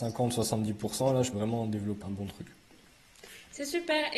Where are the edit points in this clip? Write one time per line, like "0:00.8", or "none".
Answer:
0:01.3
0:02.0